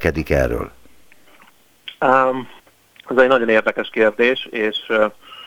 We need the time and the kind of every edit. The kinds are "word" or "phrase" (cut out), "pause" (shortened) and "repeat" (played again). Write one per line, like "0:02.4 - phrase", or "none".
0:02.6 - pause